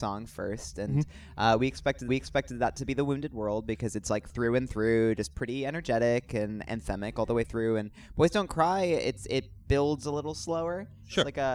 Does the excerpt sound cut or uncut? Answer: cut